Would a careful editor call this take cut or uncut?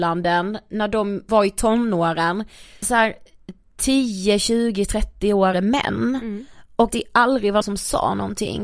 cut